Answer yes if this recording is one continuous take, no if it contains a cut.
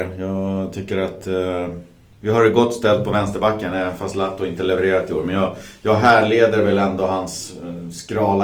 yes